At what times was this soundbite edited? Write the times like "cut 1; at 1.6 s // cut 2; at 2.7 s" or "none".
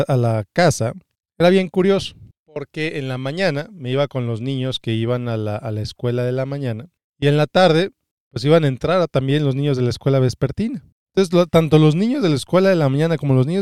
none

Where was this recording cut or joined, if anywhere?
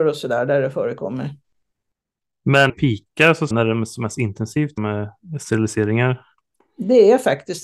cut 1; at 2.7 s // cut 2; at 3.5 s // cut 3; at 4.8 s

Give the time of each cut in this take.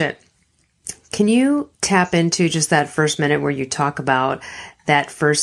cut 1; at 1.7 s

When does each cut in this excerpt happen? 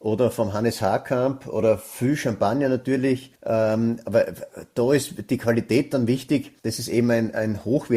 cut 1; at 3.4 s // cut 2; at 6.6 s

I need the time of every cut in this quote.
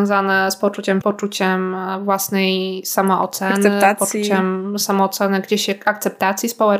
cut 1; at 1.0 s

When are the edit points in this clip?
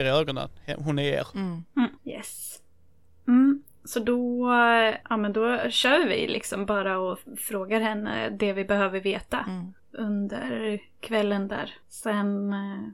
cut 1; at 2.0 s // cut 2; at 5.0 s // cut 3; at 9.8 s // cut 4; at 11.8 s

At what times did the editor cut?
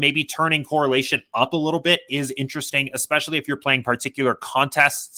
none

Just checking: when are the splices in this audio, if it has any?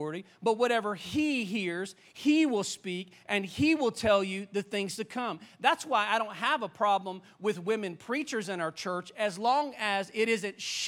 none

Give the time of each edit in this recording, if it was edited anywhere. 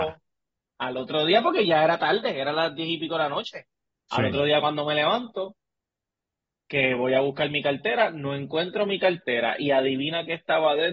none

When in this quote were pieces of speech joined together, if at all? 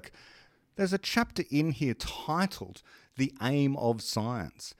none

